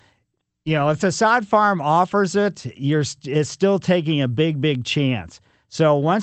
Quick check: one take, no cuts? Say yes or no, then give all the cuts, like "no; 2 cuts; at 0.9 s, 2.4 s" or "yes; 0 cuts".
yes; 0 cuts